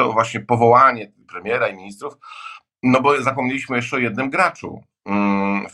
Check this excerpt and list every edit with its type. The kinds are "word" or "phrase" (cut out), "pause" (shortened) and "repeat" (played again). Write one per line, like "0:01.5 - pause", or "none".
0:01.2 - pause